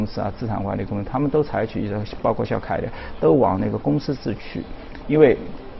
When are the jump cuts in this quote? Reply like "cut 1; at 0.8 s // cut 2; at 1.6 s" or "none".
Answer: cut 1; at 2.6 s